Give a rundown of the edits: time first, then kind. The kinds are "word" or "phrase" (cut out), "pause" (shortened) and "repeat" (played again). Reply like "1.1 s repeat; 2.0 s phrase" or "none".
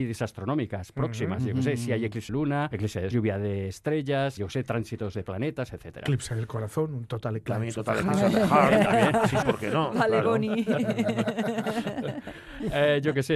2.3 s word; 2.7 s word; 3.1 s word; 4.4 s word; 9.4 s word